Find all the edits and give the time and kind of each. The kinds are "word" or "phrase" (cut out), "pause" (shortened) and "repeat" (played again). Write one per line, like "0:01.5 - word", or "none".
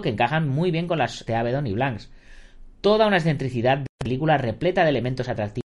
0:01.3 - word